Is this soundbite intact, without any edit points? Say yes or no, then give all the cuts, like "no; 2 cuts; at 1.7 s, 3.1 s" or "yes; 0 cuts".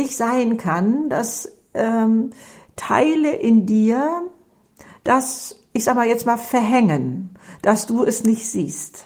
yes; 0 cuts